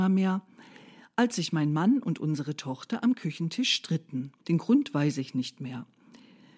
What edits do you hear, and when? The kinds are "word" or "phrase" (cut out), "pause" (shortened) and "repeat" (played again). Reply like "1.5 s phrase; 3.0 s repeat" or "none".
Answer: 4.4 s pause